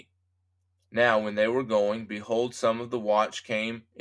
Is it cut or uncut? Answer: uncut